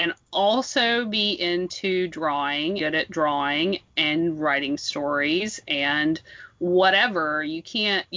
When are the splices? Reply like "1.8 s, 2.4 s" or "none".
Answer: 2.8 s